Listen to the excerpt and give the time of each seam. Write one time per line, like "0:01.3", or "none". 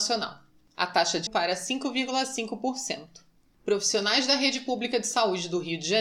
0:01.3

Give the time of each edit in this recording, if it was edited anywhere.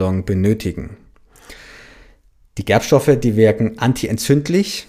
none

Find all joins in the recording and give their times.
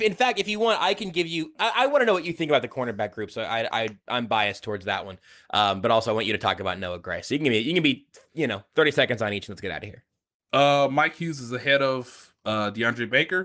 none

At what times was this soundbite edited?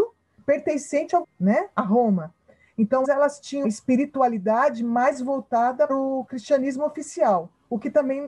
0:01.2
0:03.0
0:03.6
0:05.9

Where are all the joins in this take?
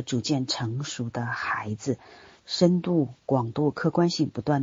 none

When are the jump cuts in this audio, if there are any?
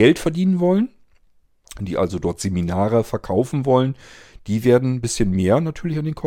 none

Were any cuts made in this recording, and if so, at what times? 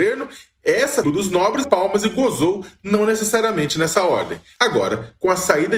0:01.0
0:01.6

